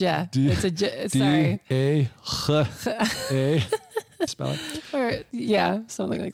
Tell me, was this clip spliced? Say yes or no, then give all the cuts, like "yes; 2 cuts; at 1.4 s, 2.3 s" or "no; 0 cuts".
yes; 1 cut; at 4.3 s